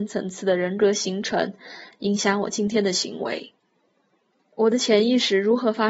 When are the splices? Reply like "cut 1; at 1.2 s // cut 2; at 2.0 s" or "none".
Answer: none